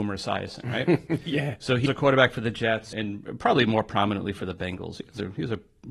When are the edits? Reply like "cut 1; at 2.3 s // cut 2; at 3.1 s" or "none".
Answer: cut 1; at 1.9 s // cut 2; at 2.9 s